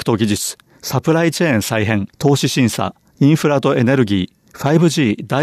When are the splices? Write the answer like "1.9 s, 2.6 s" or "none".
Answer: 2.1 s, 4.5 s